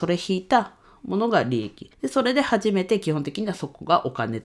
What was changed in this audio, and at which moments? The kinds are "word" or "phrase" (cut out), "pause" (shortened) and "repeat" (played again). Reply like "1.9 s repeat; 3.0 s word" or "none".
1.9 s pause